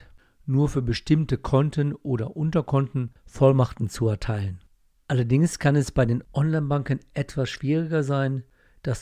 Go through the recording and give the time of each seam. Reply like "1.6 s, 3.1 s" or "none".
none